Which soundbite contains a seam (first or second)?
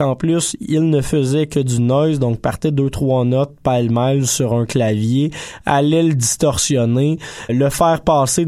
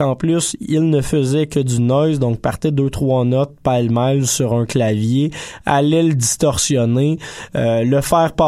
first